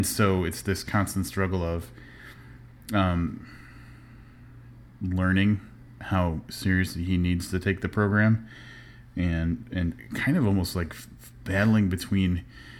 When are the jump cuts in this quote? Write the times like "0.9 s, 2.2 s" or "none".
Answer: none